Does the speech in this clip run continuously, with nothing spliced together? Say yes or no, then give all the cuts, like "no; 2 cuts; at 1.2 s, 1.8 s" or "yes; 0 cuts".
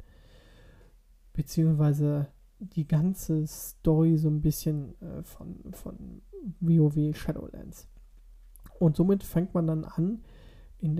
no; 1 cut; at 2.4 s